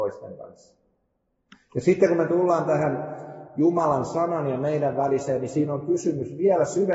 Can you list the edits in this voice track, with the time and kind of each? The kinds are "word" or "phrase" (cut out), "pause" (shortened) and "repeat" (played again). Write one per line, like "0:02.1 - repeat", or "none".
none